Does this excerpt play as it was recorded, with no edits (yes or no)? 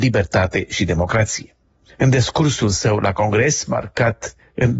yes